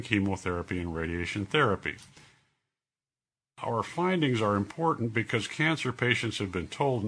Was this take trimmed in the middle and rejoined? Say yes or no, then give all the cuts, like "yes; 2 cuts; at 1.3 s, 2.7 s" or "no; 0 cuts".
no; 0 cuts